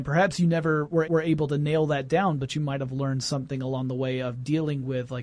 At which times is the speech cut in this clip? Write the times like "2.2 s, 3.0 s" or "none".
1.0 s